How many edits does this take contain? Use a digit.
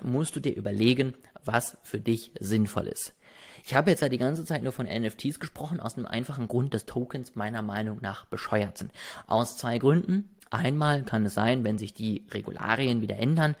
0